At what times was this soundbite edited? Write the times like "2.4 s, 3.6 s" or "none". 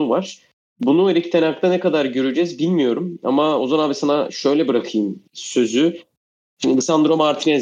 5.3 s